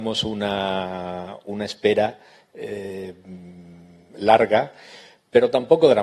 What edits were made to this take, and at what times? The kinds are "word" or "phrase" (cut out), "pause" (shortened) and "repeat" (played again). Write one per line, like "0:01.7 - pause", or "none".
none